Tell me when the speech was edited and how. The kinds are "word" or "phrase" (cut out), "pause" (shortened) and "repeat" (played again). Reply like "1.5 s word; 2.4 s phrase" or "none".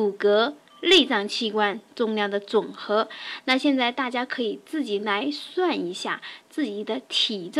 none